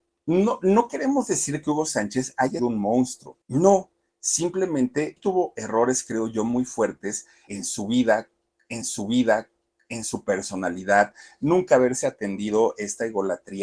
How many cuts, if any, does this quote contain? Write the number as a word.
five